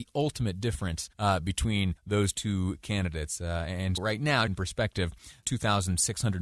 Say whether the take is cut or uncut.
cut